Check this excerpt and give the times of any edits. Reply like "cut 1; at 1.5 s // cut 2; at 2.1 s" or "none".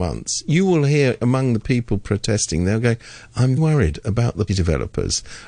cut 1; at 3.6 s // cut 2; at 4.5 s